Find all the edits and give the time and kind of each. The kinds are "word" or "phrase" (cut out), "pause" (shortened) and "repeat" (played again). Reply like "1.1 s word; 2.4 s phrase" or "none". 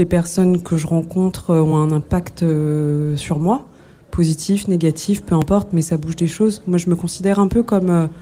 none